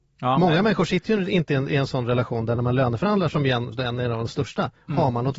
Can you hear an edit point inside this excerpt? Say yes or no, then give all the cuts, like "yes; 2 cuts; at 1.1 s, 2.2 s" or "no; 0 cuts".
no; 0 cuts